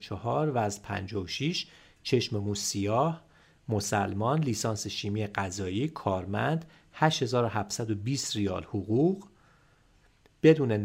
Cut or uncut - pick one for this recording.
uncut